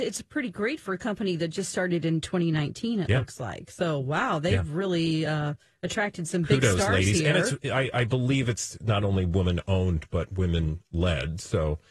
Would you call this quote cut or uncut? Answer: uncut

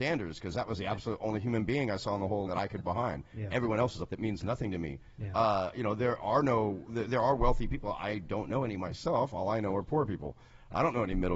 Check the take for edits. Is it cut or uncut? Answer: cut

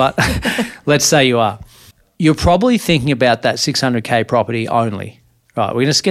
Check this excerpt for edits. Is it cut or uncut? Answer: cut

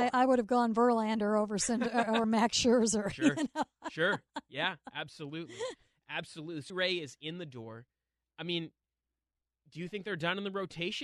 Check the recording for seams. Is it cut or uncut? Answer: cut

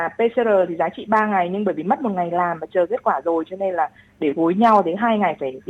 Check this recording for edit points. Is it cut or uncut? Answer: uncut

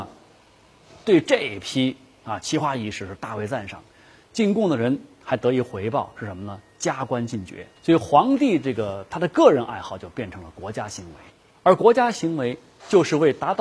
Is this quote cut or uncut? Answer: cut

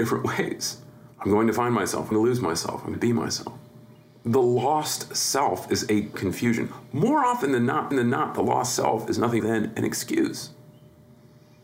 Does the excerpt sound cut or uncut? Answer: cut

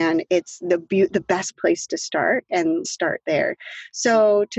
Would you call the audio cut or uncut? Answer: cut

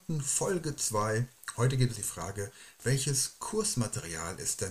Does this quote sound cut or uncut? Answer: cut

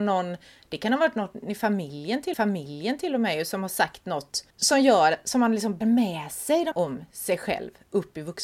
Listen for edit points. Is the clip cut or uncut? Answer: cut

